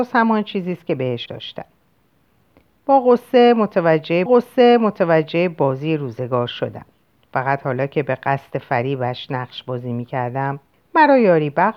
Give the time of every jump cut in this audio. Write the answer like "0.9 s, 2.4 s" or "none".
1.3 s, 4.3 s, 7.0 s, 10.7 s